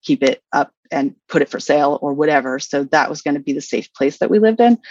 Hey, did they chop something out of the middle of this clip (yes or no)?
no